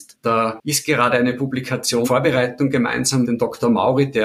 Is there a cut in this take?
yes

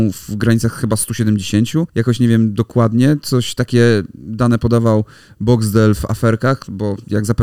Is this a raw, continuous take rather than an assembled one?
no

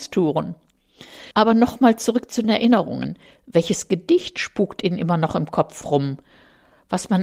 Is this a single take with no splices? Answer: no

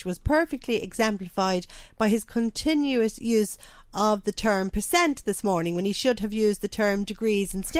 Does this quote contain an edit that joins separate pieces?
no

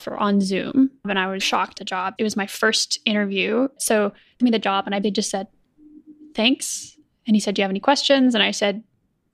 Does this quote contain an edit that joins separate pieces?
yes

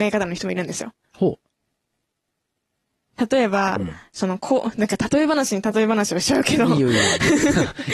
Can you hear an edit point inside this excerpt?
yes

